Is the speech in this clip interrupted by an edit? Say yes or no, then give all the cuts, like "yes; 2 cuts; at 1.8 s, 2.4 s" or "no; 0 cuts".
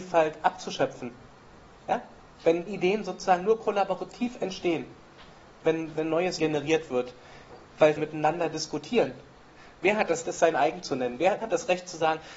yes; 6 cuts; at 2.7 s, 6.0 s, 6.4 s, 8.0 s, 10.2 s, 11.4 s